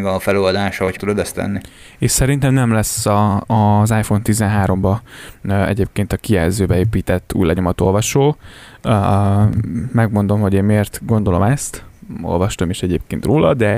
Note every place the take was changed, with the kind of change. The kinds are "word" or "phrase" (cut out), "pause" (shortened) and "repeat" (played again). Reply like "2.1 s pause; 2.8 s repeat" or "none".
1.0 s phrase